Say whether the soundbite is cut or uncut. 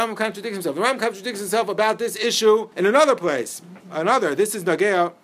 cut